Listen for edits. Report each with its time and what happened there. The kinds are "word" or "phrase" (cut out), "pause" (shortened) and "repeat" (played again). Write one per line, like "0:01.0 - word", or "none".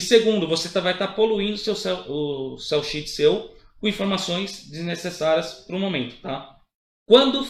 none